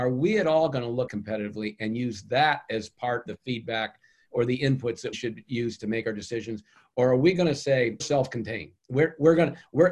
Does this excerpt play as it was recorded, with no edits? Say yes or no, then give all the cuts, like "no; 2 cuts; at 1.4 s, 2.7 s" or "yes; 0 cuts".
no; 4 cuts; at 1.1 s, 3.3 s, 5.1 s, 8.0 s